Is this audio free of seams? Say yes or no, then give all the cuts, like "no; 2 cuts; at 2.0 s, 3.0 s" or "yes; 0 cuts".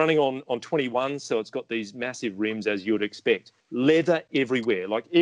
no; 1 cut; at 3.6 s